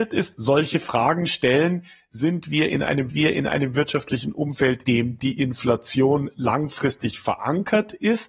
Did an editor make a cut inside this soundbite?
yes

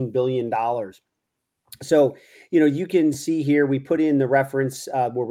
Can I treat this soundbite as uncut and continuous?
yes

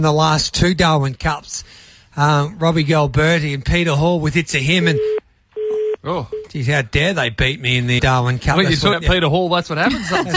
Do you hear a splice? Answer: yes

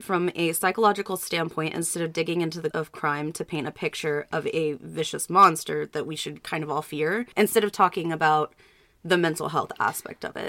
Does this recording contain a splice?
yes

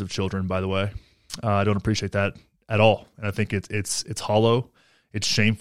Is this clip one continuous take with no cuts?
yes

